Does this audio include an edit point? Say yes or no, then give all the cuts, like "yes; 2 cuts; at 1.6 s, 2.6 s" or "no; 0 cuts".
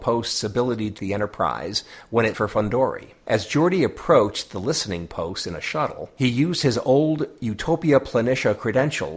yes; 3 cuts; at 1.0 s, 2.3 s, 3.2 s